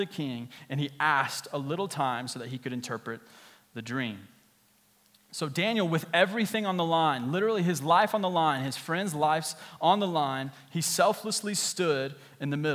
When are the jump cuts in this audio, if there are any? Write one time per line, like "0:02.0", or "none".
none